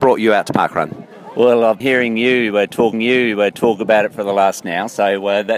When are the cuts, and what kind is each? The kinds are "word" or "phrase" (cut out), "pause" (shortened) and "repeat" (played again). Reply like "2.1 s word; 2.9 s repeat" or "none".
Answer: 1.8 s word; 2.9 s repeat; 4.6 s phrase